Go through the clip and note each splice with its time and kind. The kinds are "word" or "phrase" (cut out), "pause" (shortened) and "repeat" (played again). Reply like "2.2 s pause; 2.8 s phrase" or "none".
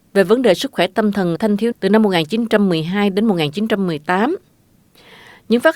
1.4 s word; 1.7 s word

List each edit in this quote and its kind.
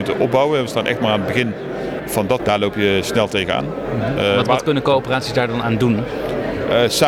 2.0 s word; 2.4 s word

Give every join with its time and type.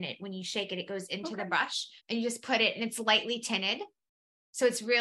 2.0 s pause

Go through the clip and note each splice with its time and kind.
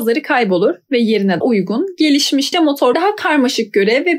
1.4 s word; 2.5 s word; 2.9 s phrase

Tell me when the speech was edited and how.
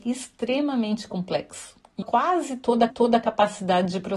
2.0 s word; 2.9 s repeat

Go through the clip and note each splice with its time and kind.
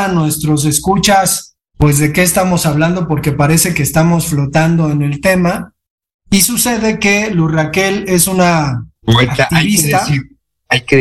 9.0 s pause

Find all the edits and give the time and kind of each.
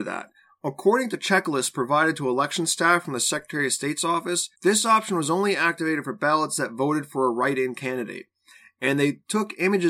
4.6 s pause

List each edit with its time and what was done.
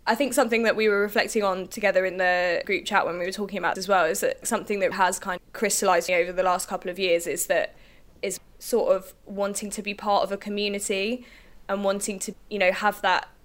2.6 s word; 3.8 s word; 4.4 s word; 4.9 s word; 5.4 s word; 6.1 s word; 8.4 s word; 12.3 s word

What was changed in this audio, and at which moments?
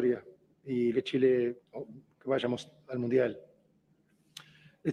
0.9 s word; 1.7 s pause

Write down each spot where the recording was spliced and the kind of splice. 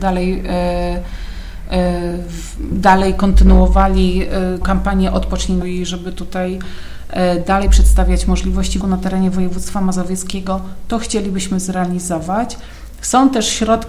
4.6 s word; 5.6 s word; 8.8 s word

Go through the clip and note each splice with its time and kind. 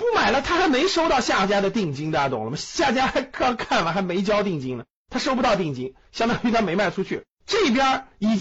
7.3 s pause

